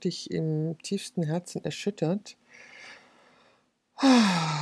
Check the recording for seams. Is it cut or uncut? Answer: uncut